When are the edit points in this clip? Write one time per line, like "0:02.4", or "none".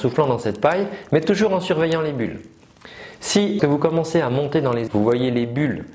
0:03.6
0:04.9